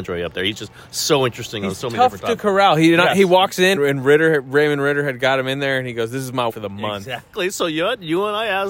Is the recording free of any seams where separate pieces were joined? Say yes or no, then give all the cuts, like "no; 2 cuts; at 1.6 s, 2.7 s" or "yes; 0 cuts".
no; 2 cuts; at 3.8 s, 6.5 s